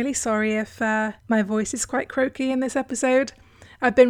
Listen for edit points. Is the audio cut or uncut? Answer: cut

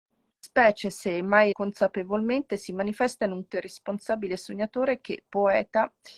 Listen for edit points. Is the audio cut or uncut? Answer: cut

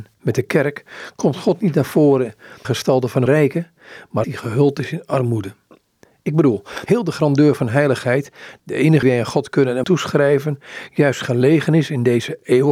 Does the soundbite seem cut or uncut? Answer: cut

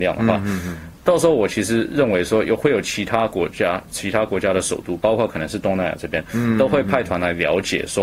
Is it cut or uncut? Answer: uncut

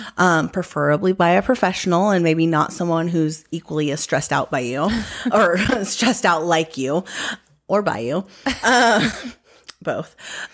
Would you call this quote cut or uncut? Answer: uncut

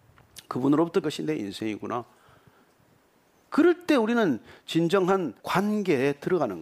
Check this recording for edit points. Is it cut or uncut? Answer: cut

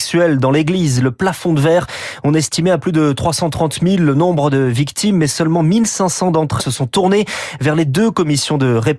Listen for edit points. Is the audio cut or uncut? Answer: cut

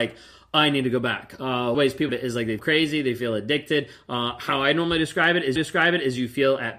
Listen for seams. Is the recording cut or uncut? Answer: cut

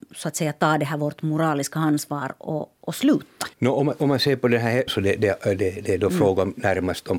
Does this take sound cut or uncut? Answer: cut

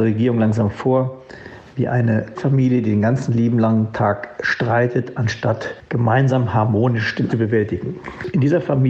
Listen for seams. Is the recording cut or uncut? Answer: cut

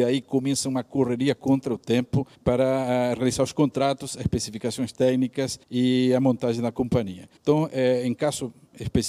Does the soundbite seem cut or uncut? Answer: cut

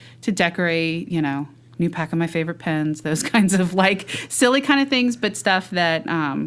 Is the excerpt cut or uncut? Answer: uncut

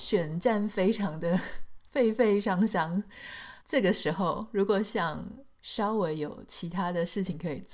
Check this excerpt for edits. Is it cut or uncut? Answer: cut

